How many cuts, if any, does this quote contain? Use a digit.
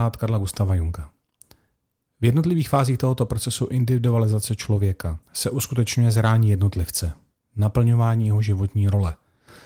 1